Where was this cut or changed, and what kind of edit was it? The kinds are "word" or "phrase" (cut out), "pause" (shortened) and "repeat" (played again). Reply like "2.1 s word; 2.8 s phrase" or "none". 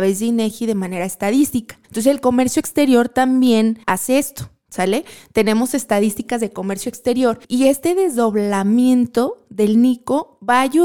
1.8 s pause; 3.8 s pause; 7.4 s pause

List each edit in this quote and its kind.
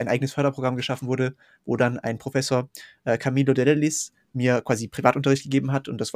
none

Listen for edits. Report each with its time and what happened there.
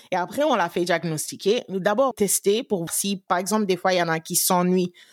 2.1 s phrase; 2.9 s word; 3.3 s word

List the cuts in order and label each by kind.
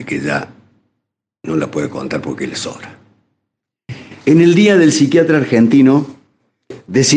none

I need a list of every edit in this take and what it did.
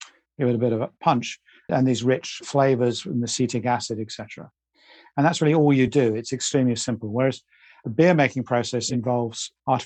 none

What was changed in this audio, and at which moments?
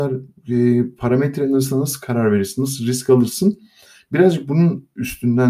none

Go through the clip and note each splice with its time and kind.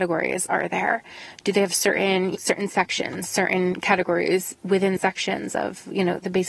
2.3 s word; 5.0 s word

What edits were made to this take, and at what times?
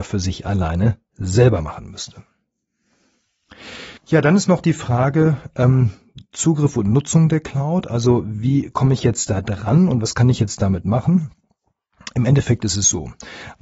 4.0 s pause

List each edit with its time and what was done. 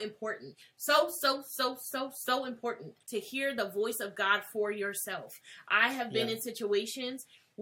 3.0 s pause

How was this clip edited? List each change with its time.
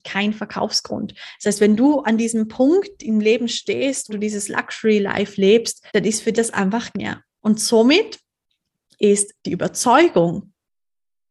2.0 s word; 4.1 s word; 5.9 s pause; 6.3 s word; 6.9 s phrase; 9.4 s pause

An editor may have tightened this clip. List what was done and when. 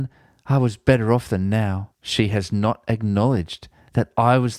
1.9 s pause

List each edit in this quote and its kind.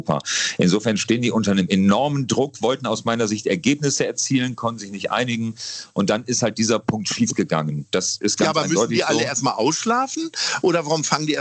none

